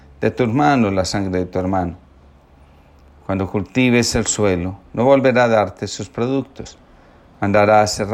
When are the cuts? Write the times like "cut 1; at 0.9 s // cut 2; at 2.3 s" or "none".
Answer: none